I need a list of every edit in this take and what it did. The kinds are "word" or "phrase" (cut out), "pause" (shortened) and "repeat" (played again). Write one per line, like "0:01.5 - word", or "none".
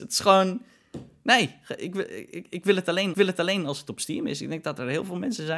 0:03.1 - repeat